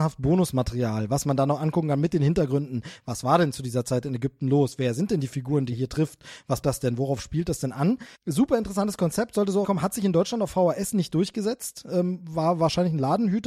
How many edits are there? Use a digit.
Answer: 4